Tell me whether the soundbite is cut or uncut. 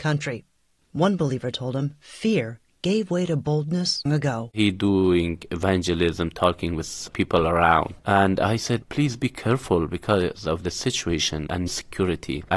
cut